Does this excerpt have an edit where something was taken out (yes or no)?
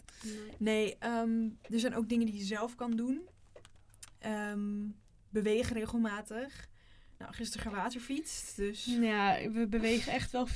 no